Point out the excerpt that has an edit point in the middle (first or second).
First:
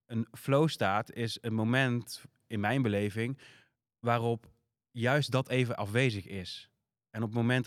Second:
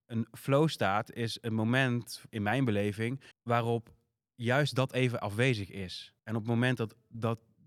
second